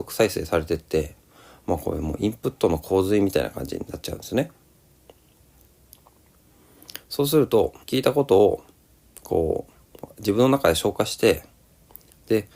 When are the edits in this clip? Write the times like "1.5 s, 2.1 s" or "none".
7.8 s